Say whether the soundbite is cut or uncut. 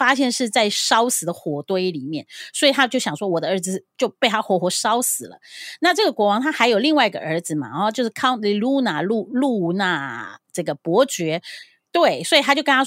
uncut